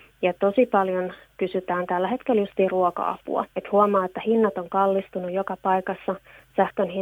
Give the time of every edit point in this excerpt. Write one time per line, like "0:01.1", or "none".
0:03.5